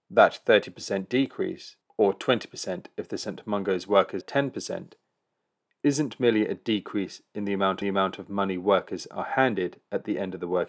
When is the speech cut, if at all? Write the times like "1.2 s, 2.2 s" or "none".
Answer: 4.2 s, 7.8 s